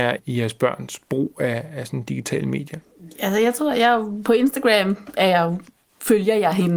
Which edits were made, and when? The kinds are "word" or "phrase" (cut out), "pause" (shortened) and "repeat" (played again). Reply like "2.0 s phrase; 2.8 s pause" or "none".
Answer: none